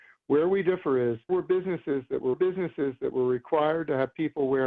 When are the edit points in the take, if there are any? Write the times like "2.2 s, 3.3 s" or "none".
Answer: 1.3 s, 2.3 s